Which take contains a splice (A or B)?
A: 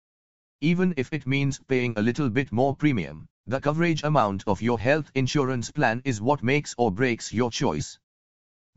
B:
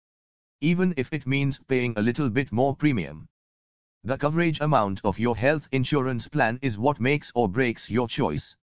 A